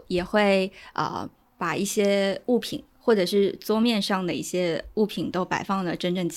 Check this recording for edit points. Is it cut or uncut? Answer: uncut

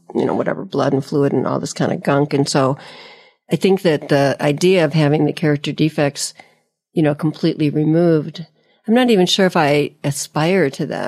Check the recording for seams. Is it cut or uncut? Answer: uncut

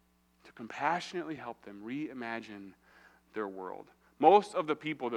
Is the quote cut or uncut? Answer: uncut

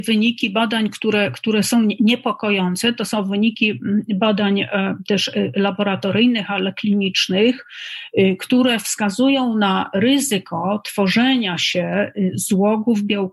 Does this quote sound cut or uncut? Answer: uncut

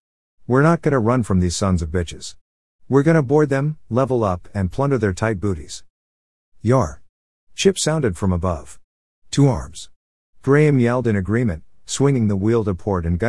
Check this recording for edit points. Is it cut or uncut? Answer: uncut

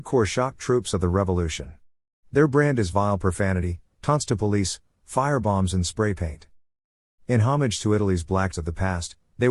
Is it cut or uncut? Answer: cut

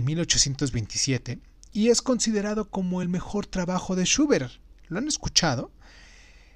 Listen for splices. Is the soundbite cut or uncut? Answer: uncut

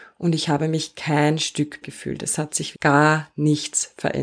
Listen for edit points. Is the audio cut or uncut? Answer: cut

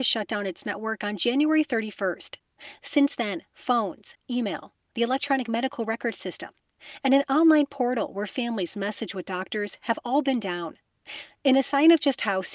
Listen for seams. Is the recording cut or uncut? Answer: uncut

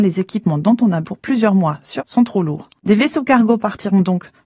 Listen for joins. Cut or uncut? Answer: cut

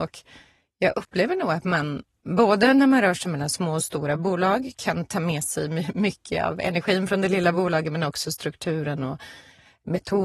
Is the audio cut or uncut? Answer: uncut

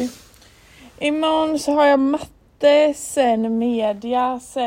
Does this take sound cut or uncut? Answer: uncut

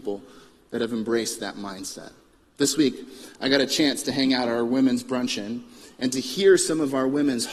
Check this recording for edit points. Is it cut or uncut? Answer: uncut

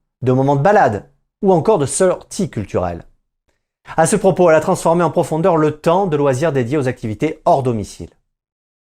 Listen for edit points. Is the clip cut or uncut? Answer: uncut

